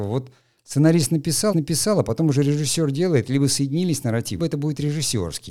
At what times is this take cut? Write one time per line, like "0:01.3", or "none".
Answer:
0:01.5
0:04.4